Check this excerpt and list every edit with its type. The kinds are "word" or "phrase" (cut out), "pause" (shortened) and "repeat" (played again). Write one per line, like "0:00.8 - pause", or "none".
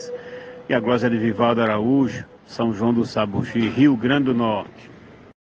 0:02.4 - pause